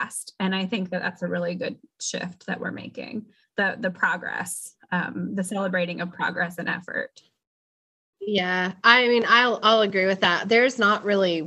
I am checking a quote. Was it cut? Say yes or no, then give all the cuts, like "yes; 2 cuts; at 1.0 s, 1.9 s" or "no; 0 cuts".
no; 0 cuts